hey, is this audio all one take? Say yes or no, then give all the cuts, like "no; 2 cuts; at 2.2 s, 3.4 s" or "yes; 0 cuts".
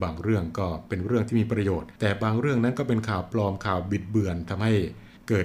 no; 1 cut; at 2.0 s